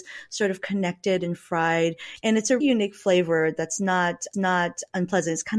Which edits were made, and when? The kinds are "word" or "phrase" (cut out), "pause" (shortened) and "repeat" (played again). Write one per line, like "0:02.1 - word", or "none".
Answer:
0:02.6 - word
0:04.3 - repeat